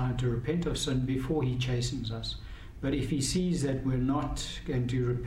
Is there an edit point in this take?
no; 0 cuts

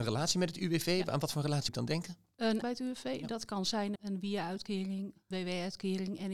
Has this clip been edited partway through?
yes; 4 cuts; at 1.7 s, 2.6 s, 4.0 s, 5.3 s

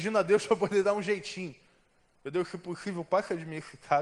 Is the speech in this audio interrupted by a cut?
no; 0 cuts

